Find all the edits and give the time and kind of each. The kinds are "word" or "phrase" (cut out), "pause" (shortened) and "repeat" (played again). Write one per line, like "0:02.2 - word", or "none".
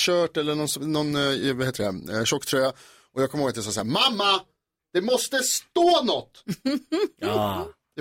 none

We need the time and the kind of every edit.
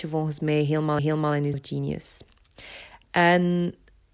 0:01.0 - repeat
0:01.5 - word

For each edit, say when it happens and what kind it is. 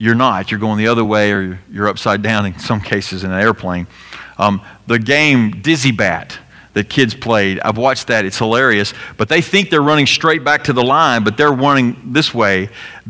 none

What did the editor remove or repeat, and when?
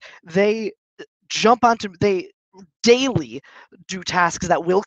none

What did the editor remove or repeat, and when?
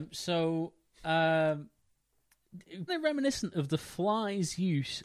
0:02.9 - word

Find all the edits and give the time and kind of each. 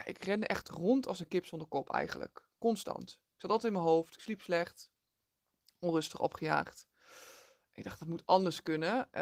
none

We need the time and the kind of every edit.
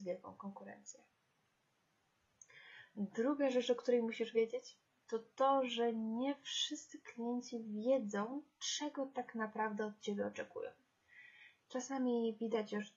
none

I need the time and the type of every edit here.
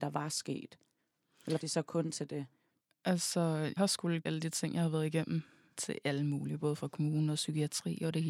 0:01.6 - word
0:03.8 - word
0:04.2 - word
0:05.8 - word

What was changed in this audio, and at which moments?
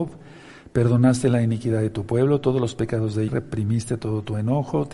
0:03.3 - phrase

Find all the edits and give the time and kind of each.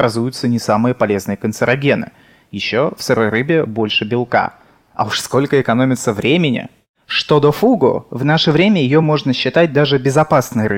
none

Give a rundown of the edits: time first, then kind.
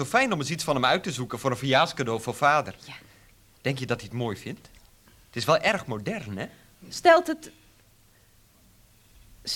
none

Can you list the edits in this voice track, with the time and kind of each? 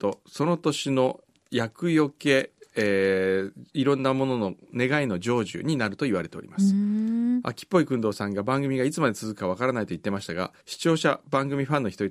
0:10.6 - pause

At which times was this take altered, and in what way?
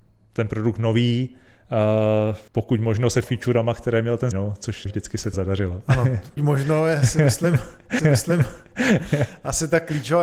0:02.5 - pause
0:03.2 - word
0:04.3 - word
0:04.9 - word
0:05.3 - word
0:06.4 - word
0:08.0 - repeat

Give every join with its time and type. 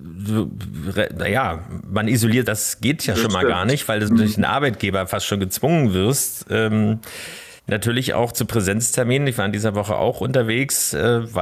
0:02.5 - phrase
0:04.1 - word
0:07.6 - pause

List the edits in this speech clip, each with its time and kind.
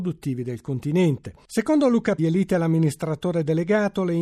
0:02.2 - phrase

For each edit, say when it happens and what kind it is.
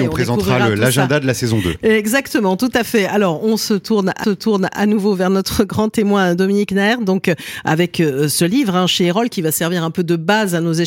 0:04.2 - repeat

